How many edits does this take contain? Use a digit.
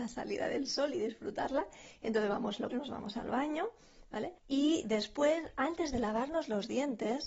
2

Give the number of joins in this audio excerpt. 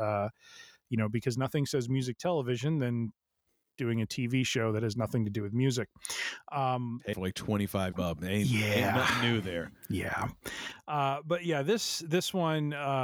2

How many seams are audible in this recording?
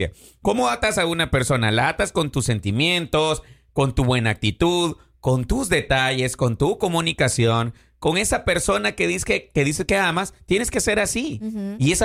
0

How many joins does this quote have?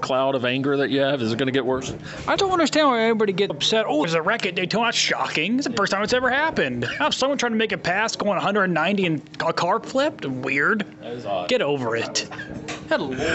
3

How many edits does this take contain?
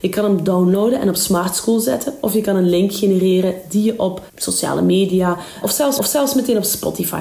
3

